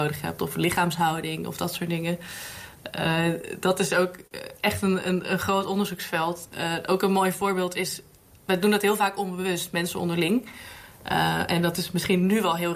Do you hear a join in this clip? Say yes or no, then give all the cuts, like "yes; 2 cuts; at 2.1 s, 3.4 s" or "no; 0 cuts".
no; 0 cuts